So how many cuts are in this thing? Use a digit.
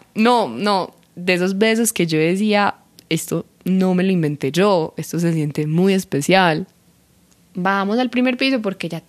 0